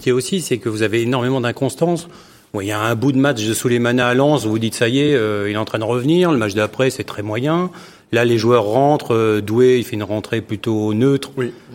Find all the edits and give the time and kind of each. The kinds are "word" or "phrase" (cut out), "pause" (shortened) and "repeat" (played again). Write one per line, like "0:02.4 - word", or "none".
none